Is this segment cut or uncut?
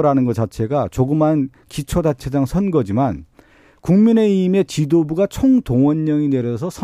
uncut